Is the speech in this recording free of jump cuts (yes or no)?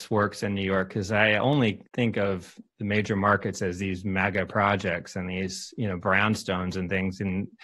no